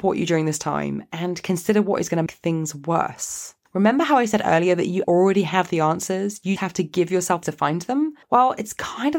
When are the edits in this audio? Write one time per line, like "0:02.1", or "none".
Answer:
0:02.3
0:05.0
0:06.6
0:07.4
0:08.2